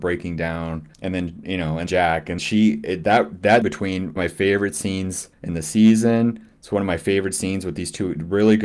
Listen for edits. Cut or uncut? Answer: cut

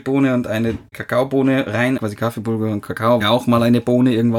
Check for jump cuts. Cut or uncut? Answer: cut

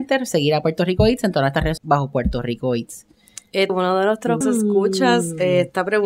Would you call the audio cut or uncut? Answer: cut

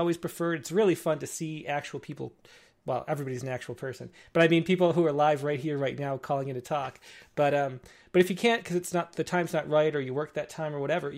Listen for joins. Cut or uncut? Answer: uncut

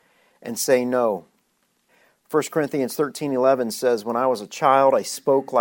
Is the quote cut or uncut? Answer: uncut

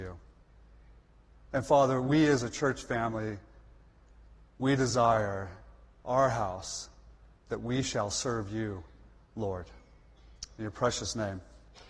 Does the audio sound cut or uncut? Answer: uncut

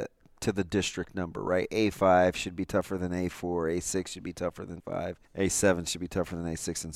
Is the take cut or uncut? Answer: cut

